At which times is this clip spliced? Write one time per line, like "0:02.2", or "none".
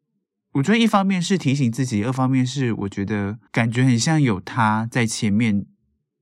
0:03.5